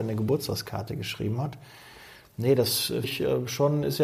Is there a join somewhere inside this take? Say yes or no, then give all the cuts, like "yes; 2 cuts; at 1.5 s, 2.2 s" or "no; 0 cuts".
yes; 1 cut; at 3.0 s